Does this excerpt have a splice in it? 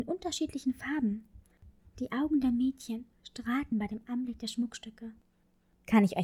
no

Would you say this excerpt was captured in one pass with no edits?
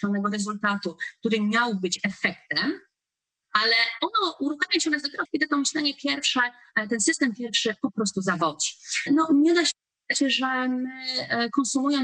no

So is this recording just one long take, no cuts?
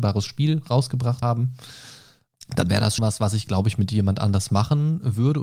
no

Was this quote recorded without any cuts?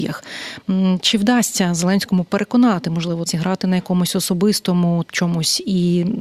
no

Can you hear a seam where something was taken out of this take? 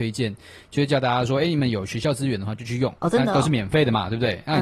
yes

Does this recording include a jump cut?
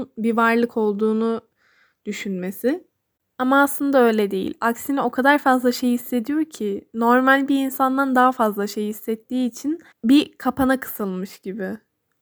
yes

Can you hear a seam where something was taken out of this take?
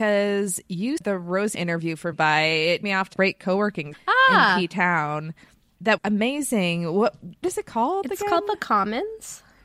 yes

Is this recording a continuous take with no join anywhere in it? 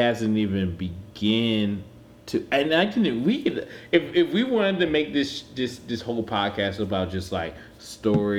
yes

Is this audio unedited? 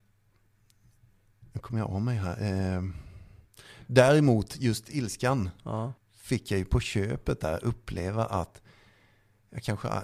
no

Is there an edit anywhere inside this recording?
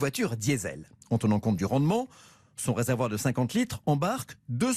no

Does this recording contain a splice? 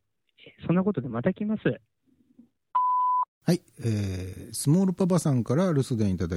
yes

